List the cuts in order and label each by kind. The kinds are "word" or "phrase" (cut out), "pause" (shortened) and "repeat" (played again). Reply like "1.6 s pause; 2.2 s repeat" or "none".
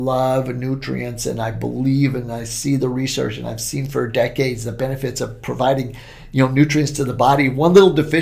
none